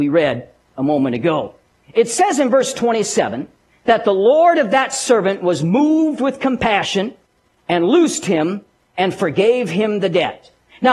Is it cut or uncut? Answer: uncut